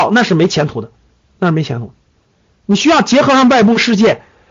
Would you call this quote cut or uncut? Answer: uncut